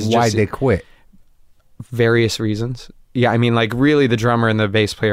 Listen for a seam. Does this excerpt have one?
no; 0 cuts

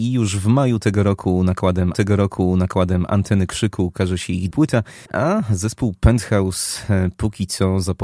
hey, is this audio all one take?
no; 3 cuts; at 1.9 s, 4.5 s, 5.1 s

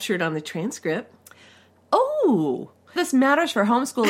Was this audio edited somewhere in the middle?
yes; 1 cut; at 3.0 s

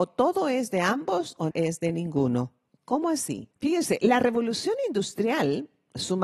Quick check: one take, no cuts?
no; 3 cuts; at 1.5 s, 2.7 s, 3.5 s

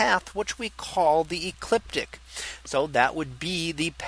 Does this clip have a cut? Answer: no; 0 cuts

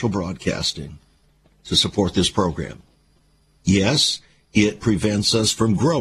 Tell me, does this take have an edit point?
no; 0 cuts

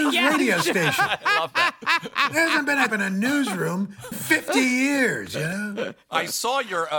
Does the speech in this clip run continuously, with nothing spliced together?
no; 2 cuts; at 2.9 s, 4.1 s

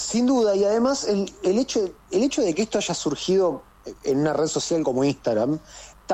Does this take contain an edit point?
no; 0 cuts

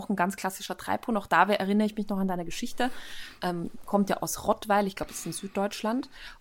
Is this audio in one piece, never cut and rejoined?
yes; 0 cuts

